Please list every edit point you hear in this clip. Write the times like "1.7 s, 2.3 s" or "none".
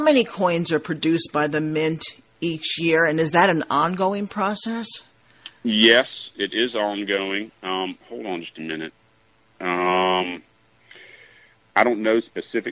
none

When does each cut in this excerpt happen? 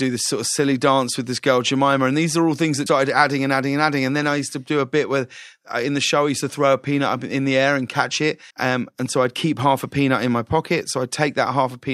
2.9 s, 8.5 s

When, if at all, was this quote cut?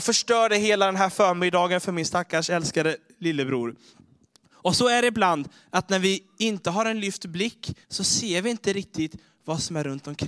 7.8 s

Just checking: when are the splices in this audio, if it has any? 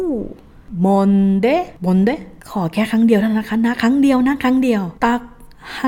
1.8 s, 2.4 s, 5.0 s

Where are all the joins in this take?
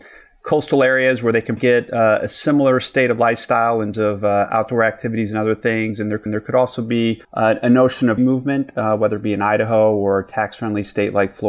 1.6 s, 3.9 s, 6.3 s, 7.2 s, 8.2 s

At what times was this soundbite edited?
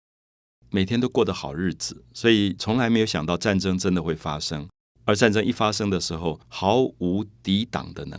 4.9 s, 6.4 s

